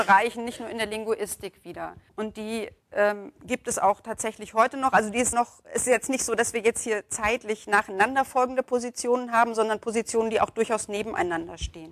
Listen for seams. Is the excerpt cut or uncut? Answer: cut